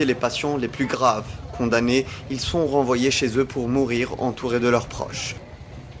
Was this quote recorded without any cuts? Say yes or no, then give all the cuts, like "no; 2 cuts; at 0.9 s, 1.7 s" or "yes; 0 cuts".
yes; 0 cuts